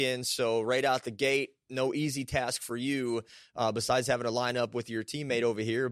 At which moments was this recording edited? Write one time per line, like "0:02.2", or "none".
none